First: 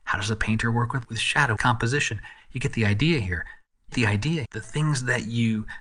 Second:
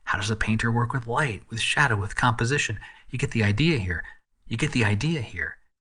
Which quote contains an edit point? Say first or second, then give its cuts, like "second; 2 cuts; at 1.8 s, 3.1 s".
first; 4 cuts; at 1.0 s, 1.6 s, 3.9 s, 4.4 s